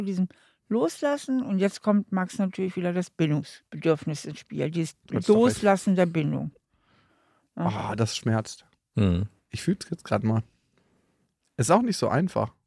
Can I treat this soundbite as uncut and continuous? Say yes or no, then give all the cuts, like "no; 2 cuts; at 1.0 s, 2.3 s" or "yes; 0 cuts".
yes; 0 cuts